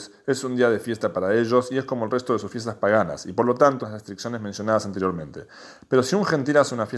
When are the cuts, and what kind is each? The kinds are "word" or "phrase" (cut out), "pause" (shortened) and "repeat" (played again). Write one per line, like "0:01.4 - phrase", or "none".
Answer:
0:03.8 - phrase